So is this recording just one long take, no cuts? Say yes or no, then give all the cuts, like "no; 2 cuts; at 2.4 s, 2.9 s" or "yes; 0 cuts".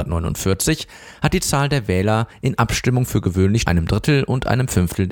no; 1 cut; at 3.7 s